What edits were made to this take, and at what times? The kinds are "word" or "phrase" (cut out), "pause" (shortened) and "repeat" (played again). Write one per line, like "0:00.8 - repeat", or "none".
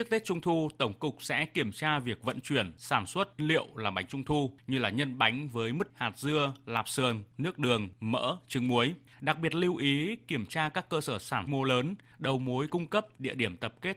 0:03.4 - phrase
0:05.9 - word
0:11.5 - phrase